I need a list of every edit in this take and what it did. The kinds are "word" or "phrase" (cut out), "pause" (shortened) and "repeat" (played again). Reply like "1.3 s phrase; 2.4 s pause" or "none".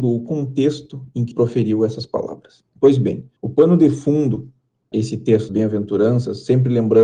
1.3 s word; 2.7 s pause; 3.4 s pause; 4.9 s word; 5.5 s word